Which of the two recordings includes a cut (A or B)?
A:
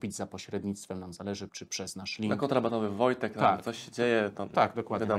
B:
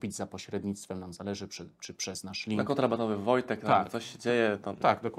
A